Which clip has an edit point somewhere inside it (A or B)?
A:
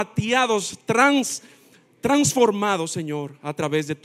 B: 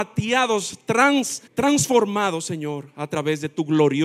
B